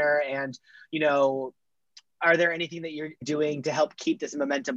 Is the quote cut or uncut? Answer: cut